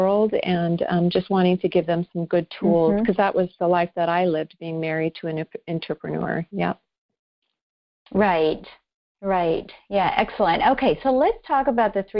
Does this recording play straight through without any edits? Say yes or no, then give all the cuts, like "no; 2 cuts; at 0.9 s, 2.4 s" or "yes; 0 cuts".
yes; 0 cuts